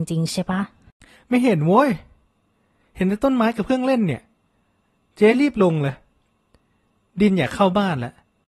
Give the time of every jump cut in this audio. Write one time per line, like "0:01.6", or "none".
none